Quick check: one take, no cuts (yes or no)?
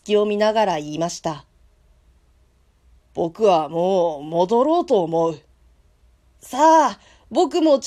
yes